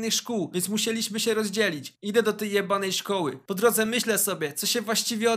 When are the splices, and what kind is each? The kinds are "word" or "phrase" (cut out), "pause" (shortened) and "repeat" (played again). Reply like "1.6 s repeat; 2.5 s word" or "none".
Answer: none